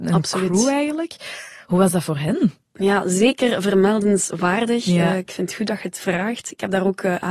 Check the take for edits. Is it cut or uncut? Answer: uncut